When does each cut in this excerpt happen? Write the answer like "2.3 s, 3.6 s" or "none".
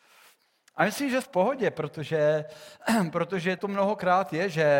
1.2 s, 3.6 s